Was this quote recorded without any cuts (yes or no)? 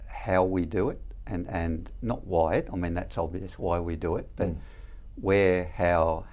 yes